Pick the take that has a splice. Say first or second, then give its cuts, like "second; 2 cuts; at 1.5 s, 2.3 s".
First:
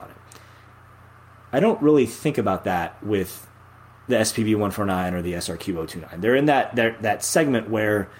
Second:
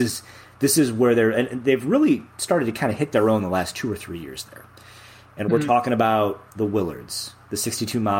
second; 1 cut; at 6.5 s